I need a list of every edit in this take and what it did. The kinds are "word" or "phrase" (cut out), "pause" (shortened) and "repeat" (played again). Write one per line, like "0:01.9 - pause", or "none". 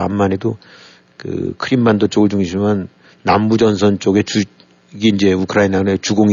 none